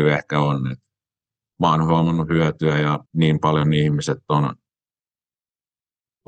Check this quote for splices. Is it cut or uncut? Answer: cut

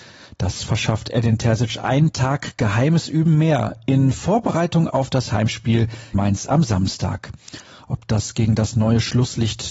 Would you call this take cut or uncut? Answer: cut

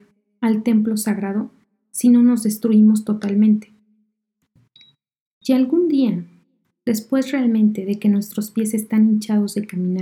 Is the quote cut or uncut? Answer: uncut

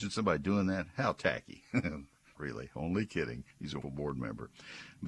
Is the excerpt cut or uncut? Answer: cut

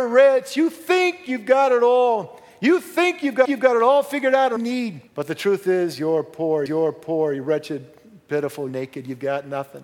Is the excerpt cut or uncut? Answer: cut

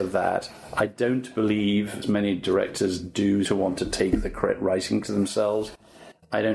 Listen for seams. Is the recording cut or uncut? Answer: cut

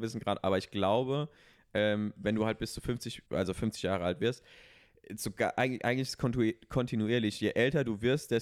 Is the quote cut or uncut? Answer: cut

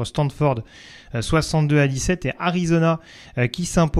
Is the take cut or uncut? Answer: uncut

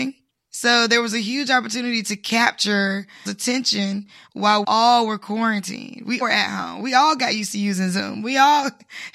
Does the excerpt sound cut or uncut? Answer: cut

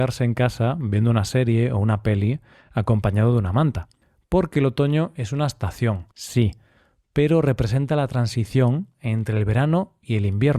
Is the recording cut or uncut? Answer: cut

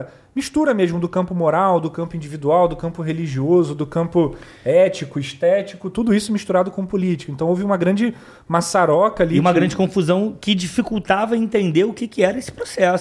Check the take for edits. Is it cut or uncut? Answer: uncut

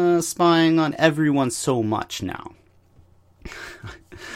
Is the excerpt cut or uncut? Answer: uncut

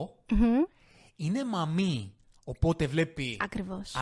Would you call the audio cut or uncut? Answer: uncut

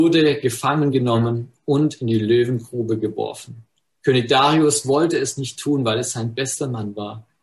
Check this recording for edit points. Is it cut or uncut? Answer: uncut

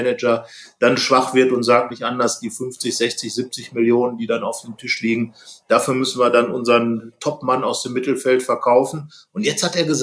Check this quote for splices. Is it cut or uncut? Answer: cut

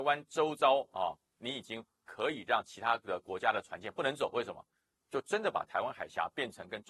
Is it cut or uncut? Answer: uncut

